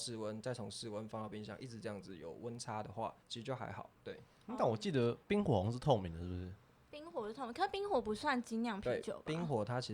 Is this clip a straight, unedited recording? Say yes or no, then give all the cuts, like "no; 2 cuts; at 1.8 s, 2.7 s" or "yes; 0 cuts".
no; 4 cuts; at 3.2 s, 4.0 s, 5.2 s, 6.7 s